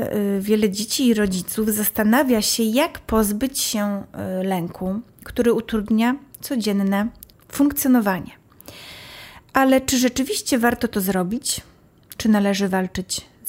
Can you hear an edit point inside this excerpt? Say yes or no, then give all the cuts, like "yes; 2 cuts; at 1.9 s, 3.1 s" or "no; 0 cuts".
no; 0 cuts